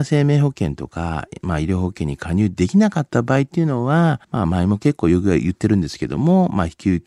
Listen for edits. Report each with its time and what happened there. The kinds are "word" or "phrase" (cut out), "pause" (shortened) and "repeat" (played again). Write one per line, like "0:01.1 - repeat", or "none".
0:04.2 - pause